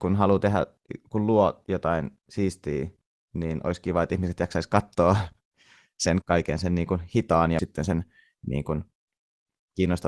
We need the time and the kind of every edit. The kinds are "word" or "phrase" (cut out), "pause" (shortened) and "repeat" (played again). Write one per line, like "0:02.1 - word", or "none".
0:06.2 - word
0:07.6 - word